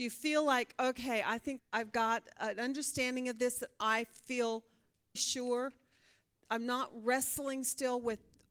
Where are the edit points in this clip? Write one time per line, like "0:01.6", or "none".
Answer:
0:01.6
0:05.2